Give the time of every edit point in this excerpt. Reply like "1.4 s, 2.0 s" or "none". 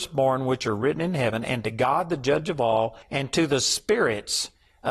3.0 s